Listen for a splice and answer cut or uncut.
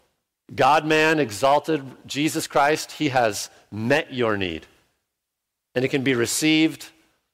uncut